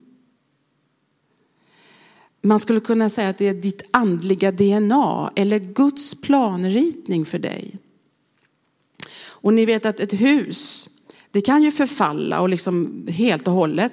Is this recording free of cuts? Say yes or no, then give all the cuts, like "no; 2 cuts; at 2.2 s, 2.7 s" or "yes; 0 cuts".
yes; 0 cuts